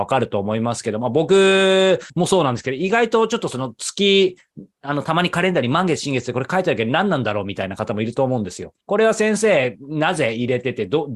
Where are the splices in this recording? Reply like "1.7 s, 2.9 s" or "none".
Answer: 2.1 s, 8.8 s